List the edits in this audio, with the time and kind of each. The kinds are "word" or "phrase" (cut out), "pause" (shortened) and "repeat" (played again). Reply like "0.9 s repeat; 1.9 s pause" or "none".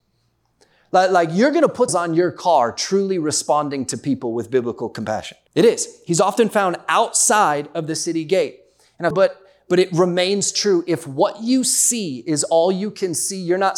1.9 s phrase; 5.5 s pause; 9.1 s phrase